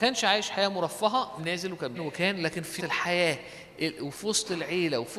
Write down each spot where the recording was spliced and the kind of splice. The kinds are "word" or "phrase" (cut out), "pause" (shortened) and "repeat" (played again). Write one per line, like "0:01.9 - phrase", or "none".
0:01.4 - word
0:01.9 - phrase
0:02.8 - word